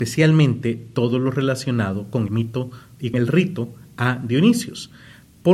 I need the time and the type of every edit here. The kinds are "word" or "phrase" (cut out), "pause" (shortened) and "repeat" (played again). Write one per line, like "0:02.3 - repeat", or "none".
0:02.3 - word
0:03.1 - word